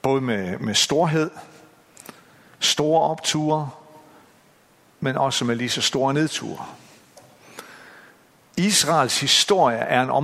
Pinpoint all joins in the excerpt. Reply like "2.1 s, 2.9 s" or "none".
none